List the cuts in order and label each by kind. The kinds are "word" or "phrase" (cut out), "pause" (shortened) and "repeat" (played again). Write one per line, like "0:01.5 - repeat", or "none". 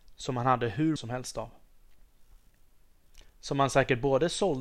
0:01.0 - word
0:03.3 - pause